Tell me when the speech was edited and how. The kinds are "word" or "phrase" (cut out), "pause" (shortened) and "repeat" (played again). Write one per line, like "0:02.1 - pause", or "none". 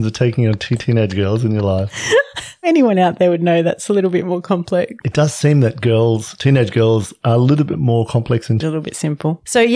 0:02.6 - word
0:05.0 - pause
0:08.6 - phrase